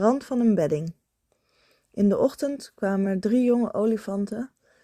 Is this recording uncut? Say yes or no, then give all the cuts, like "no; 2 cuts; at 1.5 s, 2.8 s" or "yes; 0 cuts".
yes; 0 cuts